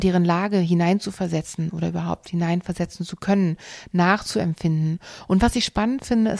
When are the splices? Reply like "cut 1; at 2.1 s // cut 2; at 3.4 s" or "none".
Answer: none